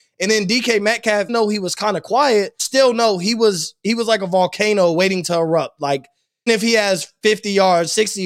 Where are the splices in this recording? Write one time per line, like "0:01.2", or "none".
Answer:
0:01.3
0:02.6
0:06.5